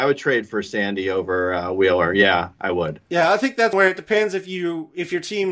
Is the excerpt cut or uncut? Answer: cut